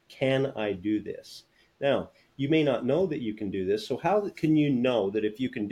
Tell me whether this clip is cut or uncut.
uncut